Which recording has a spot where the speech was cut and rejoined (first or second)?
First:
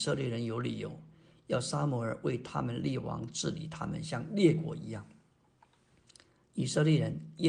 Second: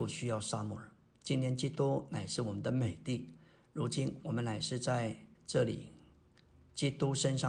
second